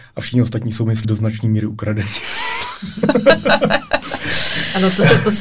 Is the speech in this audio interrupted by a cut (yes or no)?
yes